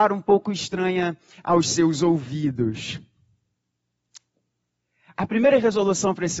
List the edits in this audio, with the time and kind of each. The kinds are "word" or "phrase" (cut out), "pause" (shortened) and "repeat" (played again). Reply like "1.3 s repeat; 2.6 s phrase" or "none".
none